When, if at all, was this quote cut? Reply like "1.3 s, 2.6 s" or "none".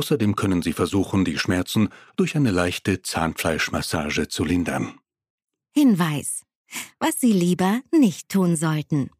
none